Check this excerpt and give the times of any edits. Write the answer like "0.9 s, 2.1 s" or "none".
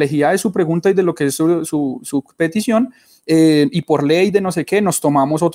none